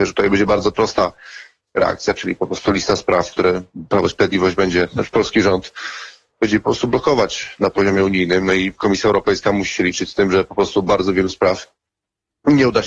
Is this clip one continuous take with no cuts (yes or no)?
yes